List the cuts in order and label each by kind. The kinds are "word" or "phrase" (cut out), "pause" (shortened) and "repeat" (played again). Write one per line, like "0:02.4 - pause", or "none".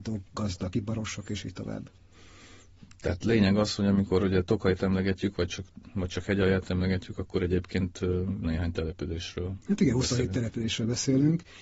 0:08.4 - word
0:09.6 - pause